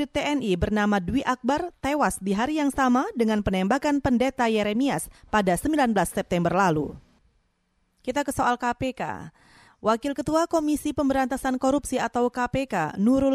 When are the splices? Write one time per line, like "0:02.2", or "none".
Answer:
none